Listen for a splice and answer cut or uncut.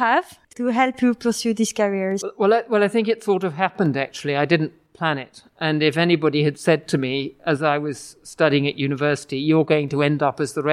uncut